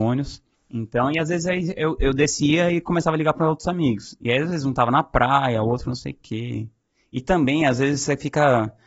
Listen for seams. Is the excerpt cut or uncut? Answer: uncut